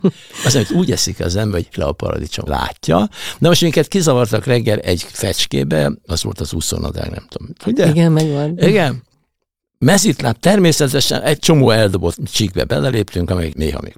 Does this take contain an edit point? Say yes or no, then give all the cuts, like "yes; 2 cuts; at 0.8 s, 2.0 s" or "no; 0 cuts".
yes; 2 cuts; at 1.7 s, 2.5 s